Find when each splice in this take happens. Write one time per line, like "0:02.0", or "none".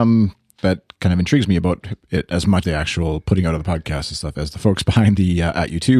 0:02.6